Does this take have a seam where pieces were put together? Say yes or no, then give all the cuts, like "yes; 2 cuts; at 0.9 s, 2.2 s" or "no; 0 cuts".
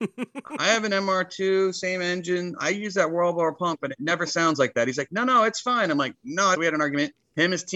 yes; 1 cut; at 6.5 s